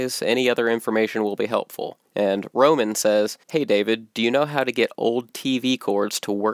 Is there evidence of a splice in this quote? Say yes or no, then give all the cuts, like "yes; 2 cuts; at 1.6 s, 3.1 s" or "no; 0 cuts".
yes; 2 cuts; at 2.0 s, 3.4 s